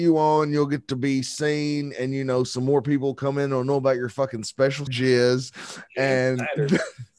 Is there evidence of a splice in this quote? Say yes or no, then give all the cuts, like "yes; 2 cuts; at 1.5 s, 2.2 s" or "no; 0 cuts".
yes; 1 cut; at 4.9 s